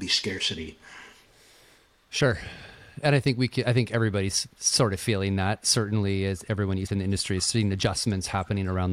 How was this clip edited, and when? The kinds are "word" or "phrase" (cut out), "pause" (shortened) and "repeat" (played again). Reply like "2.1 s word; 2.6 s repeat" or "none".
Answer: 6.9 s word